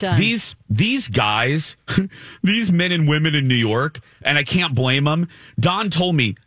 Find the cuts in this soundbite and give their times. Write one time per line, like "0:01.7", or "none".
none